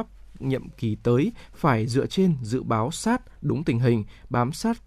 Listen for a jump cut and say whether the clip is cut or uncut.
uncut